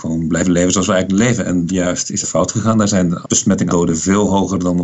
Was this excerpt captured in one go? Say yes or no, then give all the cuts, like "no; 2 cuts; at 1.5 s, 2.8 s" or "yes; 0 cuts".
no; 4 cuts; at 1.7 s, 2.2 s, 3.2 s, 3.7 s